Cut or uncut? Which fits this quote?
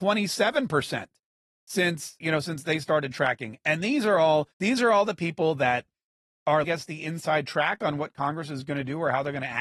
cut